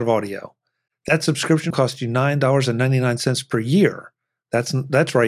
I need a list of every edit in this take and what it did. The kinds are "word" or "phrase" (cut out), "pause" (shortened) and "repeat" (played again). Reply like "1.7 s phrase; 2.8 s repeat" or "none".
1.7 s word